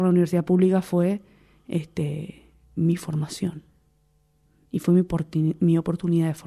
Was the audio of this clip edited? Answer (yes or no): no